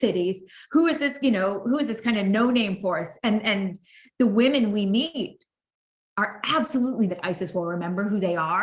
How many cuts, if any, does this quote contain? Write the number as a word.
one